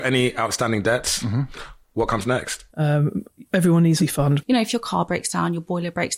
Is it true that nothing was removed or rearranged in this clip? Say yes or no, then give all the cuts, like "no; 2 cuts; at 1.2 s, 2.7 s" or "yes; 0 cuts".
no; 2 cuts; at 2.7 s, 4.0 s